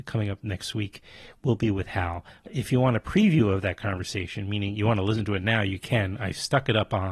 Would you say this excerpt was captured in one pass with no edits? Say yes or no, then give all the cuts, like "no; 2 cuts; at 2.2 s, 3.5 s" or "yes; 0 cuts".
yes; 0 cuts